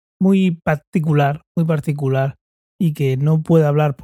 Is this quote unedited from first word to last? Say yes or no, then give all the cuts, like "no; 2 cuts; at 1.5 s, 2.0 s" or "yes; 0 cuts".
yes; 0 cuts